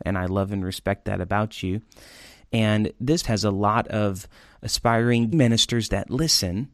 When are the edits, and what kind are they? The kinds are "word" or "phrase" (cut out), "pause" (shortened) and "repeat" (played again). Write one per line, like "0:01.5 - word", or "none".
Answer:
0:03.2 - word
0:05.3 - word